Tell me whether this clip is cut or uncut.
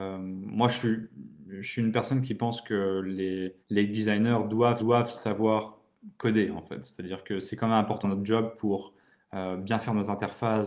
cut